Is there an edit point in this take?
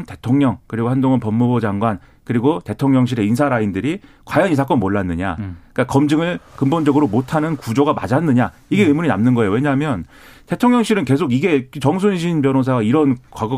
no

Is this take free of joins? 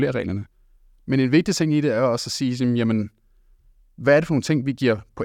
yes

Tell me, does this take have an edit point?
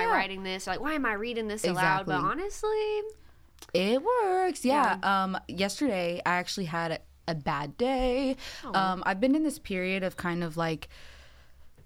no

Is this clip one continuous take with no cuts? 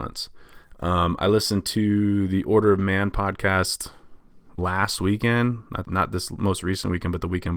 no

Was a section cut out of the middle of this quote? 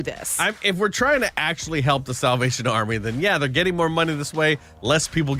no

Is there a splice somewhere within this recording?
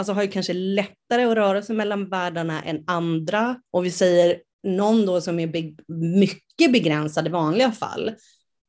yes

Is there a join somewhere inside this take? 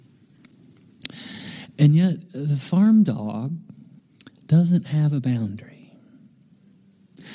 yes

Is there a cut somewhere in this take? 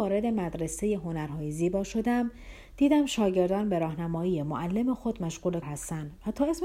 yes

